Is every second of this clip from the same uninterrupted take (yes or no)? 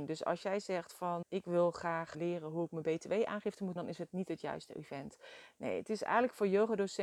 no